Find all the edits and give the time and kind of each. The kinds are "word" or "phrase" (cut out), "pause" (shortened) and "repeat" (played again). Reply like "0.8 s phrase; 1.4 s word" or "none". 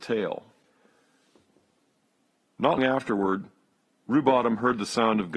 2.8 s word